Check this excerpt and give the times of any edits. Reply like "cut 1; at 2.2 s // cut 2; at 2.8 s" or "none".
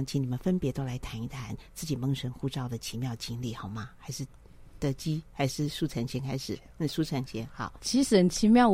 cut 1; at 7.8 s